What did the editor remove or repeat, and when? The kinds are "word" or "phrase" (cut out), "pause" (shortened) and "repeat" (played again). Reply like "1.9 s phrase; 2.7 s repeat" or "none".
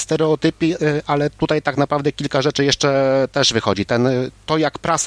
none